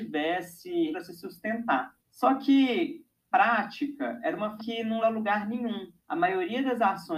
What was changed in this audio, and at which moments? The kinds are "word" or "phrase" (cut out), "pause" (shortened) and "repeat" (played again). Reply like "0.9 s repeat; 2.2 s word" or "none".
0.9 s phrase; 2.0 s pause; 3.3 s word; 4.6 s word; 5.0 s word; 6.0 s pause